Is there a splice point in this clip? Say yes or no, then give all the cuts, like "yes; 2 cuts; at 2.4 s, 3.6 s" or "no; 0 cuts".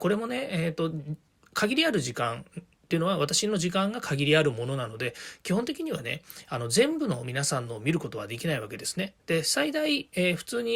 no; 0 cuts